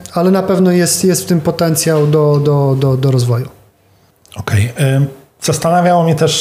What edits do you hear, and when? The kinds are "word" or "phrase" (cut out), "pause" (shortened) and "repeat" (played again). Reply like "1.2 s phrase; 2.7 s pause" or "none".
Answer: none